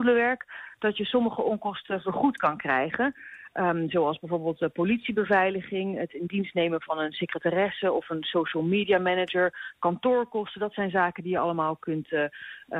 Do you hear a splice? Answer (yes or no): no